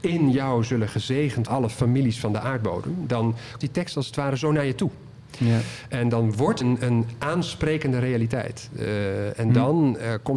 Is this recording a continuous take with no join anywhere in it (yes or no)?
no